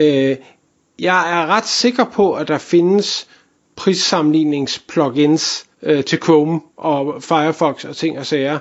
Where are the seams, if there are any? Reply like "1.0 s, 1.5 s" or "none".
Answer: 5.7 s, 6.7 s